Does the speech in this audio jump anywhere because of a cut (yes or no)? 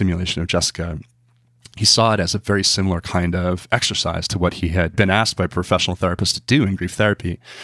no